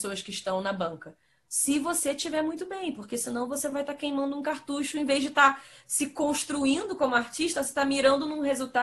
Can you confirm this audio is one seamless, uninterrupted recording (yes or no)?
yes